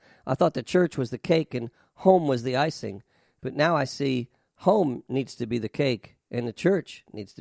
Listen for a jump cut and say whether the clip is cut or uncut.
uncut